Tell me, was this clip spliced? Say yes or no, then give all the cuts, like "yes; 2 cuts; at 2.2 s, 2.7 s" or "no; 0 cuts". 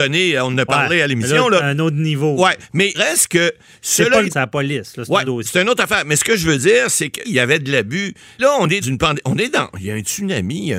yes; 6 cuts; at 2.9 s, 4.3 s, 5.2 s, 7.2 s, 8.4 s, 8.8 s